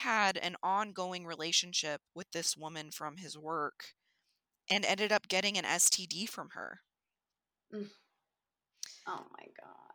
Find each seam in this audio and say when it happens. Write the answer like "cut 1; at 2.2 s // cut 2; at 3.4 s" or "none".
cut 1; at 2.1 s